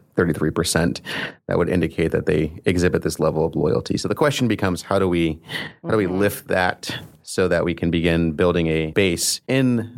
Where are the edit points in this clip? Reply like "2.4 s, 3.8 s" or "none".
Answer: none

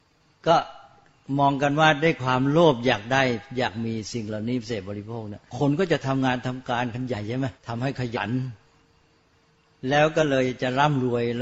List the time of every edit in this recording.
5.5 s, 7.6 s

